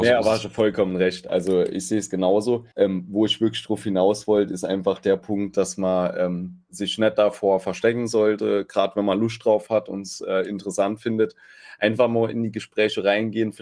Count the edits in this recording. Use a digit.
1